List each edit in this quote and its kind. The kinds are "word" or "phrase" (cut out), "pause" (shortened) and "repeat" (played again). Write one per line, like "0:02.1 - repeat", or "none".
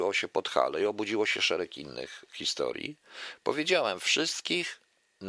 none